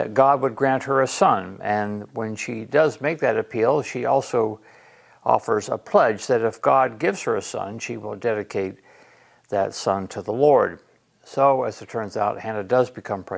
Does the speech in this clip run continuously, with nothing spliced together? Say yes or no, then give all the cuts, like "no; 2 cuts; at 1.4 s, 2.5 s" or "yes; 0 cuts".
yes; 0 cuts